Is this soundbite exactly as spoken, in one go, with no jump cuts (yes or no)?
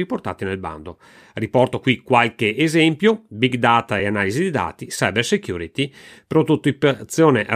yes